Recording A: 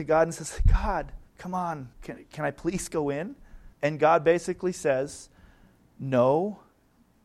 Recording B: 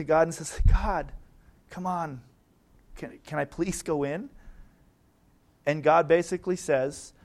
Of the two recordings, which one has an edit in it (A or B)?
A